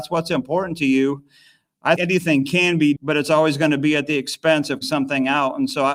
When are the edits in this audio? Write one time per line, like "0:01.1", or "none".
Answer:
0:02.0
0:03.0
0:04.8